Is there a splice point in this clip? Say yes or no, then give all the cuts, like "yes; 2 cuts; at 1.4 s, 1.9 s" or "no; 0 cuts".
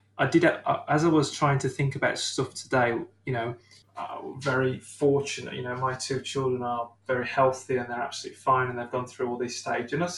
no; 0 cuts